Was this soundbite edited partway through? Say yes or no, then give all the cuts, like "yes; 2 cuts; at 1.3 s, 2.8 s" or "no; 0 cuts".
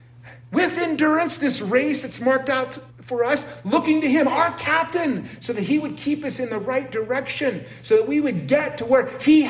yes; 1 cut; at 2.9 s